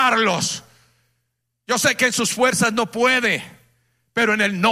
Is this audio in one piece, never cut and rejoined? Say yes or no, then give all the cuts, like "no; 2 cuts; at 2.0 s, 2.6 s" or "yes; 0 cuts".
yes; 0 cuts